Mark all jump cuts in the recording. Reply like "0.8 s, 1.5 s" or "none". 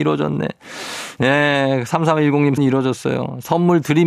2.6 s